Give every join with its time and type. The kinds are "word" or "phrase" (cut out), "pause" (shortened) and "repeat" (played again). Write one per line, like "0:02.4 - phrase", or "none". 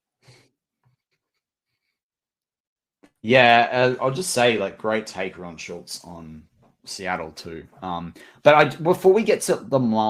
none